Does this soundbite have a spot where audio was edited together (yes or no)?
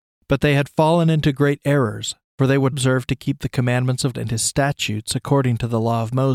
yes